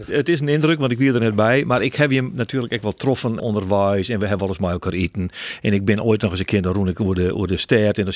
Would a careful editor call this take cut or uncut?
cut